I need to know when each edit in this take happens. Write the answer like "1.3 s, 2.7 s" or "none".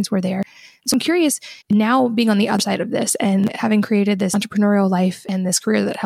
1.6 s